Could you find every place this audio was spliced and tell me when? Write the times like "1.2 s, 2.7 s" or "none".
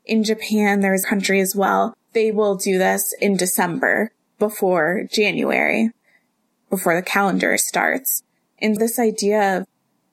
1.0 s, 7.6 s, 8.8 s